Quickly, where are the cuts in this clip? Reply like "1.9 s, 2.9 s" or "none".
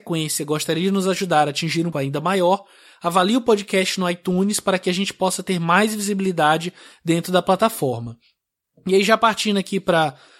1.9 s